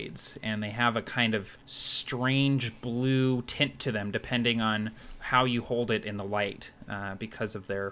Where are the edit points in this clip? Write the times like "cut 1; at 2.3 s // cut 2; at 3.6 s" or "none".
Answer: cut 1; at 1.6 s